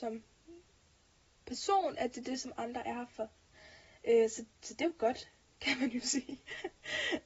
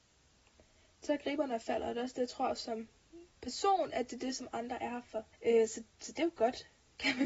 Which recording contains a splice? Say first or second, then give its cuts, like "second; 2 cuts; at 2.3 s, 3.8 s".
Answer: second; 2 cuts; at 3.3 s, 5.3 s